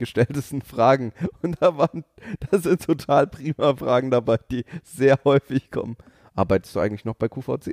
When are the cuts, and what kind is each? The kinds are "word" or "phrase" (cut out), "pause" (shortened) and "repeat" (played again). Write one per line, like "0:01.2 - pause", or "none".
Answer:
none